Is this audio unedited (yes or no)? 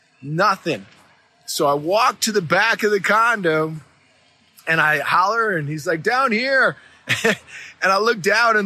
yes